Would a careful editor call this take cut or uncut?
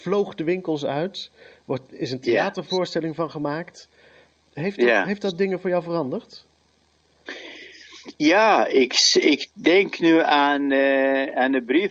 uncut